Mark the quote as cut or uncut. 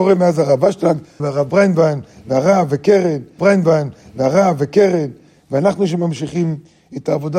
cut